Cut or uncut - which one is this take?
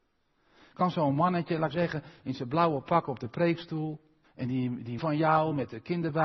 cut